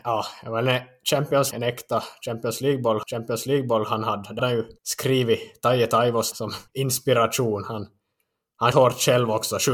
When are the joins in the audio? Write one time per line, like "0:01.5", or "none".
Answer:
0:01.5
0:03.0
0:04.4
0:04.8
0:06.3
0:06.7
0:08.7